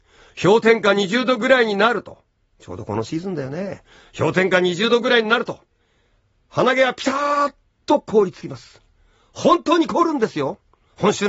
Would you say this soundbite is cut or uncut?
uncut